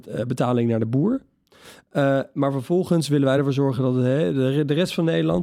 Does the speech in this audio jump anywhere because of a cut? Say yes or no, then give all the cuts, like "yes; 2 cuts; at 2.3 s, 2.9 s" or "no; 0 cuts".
no; 0 cuts